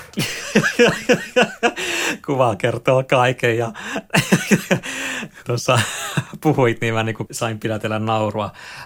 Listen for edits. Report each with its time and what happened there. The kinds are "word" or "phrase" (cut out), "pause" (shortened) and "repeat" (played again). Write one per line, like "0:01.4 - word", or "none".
0:05.4 - word
0:07.3 - word